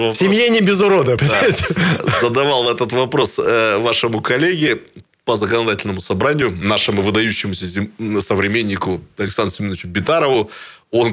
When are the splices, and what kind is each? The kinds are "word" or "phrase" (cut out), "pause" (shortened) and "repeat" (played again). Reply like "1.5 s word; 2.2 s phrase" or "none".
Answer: none